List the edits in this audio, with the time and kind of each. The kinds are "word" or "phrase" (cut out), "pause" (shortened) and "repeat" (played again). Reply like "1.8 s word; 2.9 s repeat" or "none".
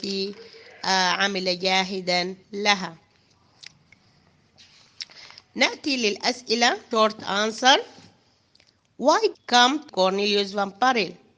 2.4 s pause; 6.9 s word; 9.3 s phrase; 9.9 s word